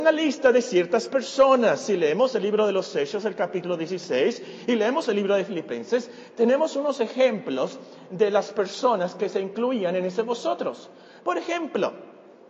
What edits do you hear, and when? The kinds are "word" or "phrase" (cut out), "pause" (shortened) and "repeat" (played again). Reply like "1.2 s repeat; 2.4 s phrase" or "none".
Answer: none